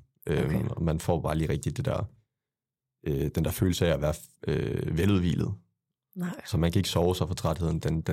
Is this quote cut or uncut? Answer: uncut